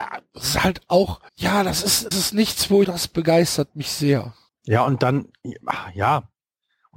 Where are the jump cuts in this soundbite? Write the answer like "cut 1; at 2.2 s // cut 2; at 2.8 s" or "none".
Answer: cut 1; at 1.3 s // cut 2; at 2.1 s // cut 3; at 2.8 s // cut 4; at 4.5 s